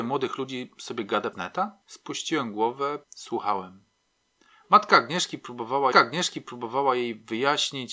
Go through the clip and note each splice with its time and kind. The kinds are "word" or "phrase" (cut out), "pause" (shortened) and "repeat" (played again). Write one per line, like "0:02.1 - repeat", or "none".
0:01.3 - word
0:01.8 - pause
0:03.0 - pause
0:05.9 - repeat